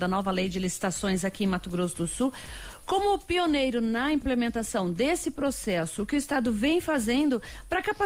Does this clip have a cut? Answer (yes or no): no